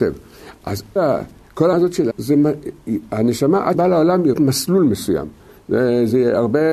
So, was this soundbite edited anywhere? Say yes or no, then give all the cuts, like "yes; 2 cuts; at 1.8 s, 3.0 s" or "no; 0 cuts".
yes; 5 cuts; at 1.0 s, 1.7 s, 2.1 s, 3.7 s, 4.3 s